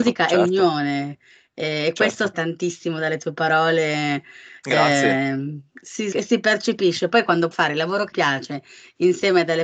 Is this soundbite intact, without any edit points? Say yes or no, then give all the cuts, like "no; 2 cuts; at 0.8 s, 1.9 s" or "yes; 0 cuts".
no; 4 cuts; at 2.3 s, 6.1 s, 7.5 s, 8.1 s